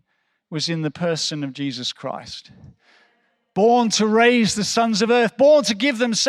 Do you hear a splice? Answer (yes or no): no